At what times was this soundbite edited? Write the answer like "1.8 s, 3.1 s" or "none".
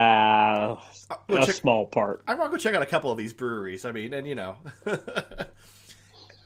1.3 s